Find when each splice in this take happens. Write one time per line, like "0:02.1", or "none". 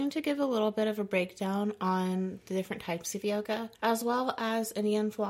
0:03.7

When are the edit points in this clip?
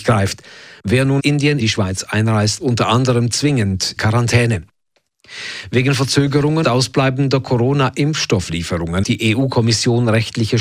0:01.2
0:01.6
0:02.6
0:04.0
0:06.6
0:09.0

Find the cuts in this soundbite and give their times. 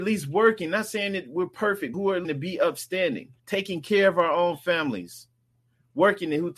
0:01.9
0:02.2
0:03.4

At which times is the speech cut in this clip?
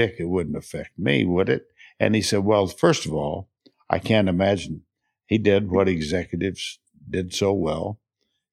none

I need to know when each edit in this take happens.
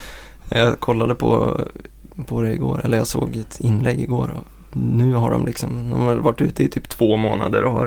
none

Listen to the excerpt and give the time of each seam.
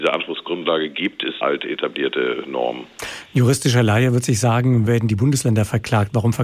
0:01.4
0:04.9

